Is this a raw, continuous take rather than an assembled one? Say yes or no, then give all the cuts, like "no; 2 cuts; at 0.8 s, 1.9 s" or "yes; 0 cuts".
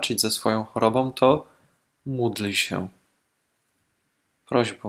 yes; 0 cuts